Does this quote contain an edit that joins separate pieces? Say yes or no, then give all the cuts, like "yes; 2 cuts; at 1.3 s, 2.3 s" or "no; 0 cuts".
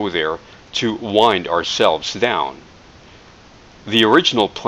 no; 0 cuts